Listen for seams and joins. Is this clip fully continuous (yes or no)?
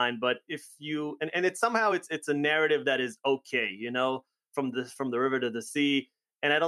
yes